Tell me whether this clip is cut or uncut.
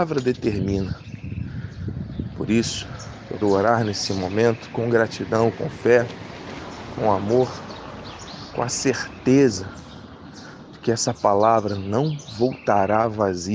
cut